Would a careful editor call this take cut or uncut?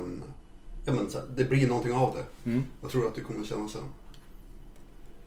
uncut